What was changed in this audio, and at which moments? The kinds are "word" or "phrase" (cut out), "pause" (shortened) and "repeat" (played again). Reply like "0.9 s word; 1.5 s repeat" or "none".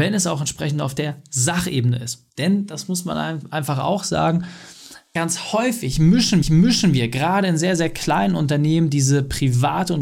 6.4 s repeat

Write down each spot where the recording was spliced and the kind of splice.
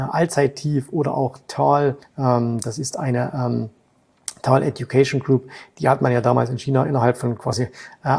2.0 s pause

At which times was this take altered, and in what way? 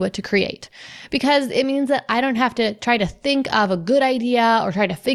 none

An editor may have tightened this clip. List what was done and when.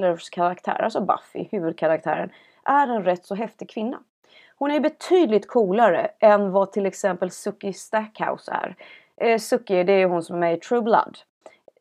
none

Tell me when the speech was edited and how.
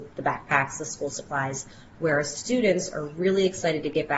none

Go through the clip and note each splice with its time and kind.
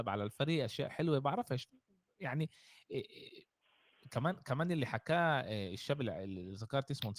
none

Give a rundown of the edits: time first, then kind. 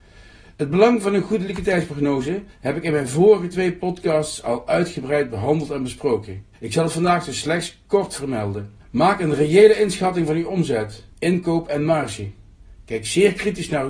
2.5 s pause; 6.5 s pause; 8.8 s pause; 11.1 s pause

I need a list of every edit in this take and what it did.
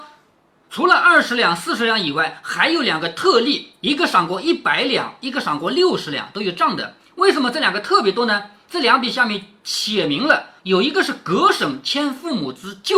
10.6 s pause

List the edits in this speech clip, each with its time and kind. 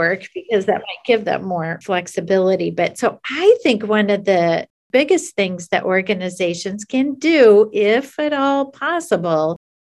none

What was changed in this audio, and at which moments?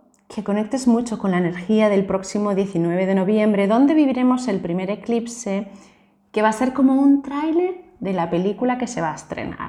none

